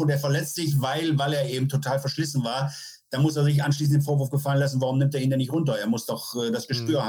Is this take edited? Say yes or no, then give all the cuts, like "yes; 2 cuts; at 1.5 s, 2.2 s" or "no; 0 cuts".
no; 0 cuts